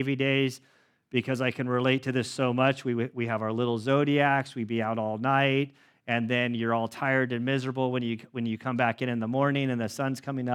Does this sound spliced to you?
no; 0 cuts

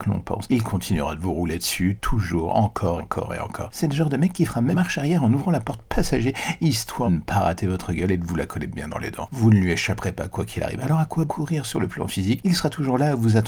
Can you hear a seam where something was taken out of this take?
yes; 4 cuts; at 3.0 s, 4.7 s, 7.1 s, 11.3 s

